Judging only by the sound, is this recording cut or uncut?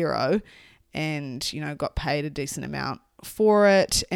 uncut